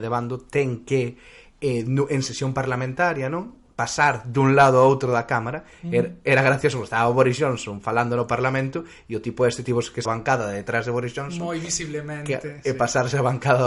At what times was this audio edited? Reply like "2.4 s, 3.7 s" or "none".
10.0 s

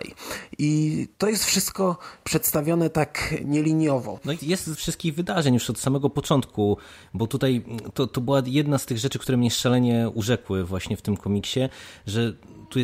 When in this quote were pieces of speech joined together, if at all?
1.1 s, 4.4 s, 4.7 s

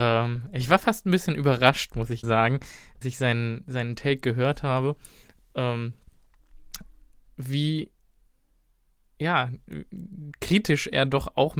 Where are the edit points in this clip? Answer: 2.2 s, 3.0 s

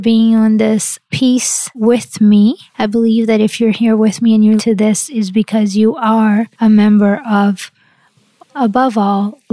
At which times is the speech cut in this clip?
1.7 s, 2.7 s, 4.6 s, 6.5 s

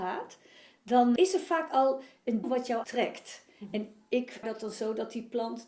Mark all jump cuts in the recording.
1.2 s, 2.4 s, 2.8 s, 4.4 s

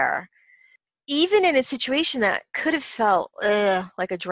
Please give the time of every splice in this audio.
none

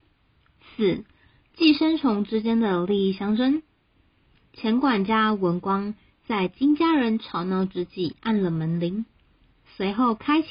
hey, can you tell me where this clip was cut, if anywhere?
none

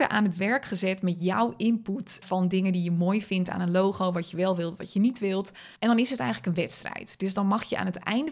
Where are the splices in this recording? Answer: 2.2 s, 5.8 s

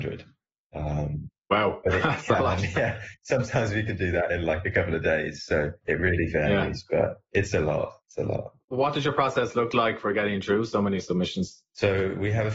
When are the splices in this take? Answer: 8.0 s, 8.6 s

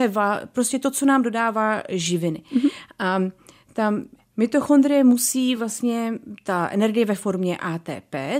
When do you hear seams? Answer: none

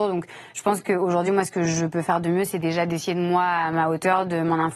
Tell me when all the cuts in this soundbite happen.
none

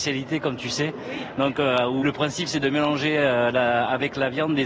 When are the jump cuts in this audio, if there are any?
2.0 s

